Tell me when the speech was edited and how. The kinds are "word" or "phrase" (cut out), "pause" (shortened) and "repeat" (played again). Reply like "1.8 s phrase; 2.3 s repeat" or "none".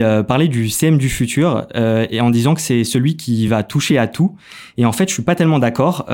none